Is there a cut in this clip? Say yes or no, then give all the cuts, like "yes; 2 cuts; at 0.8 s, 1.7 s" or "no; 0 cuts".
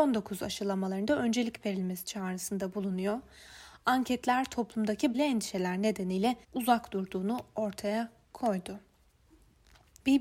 yes; 2 cuts; at 5.1 s, 6.4 s